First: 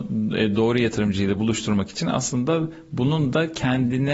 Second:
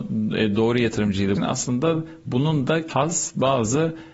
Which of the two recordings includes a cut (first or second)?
second